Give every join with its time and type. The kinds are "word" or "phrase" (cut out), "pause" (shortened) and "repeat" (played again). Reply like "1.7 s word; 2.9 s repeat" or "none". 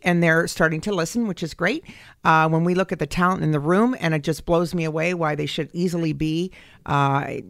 none